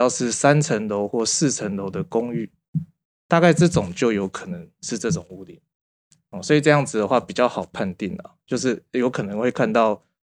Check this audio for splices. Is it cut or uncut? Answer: uncut